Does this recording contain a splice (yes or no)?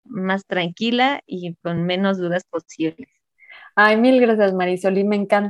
no